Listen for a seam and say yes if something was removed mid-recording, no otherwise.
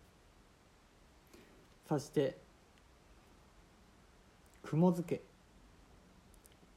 no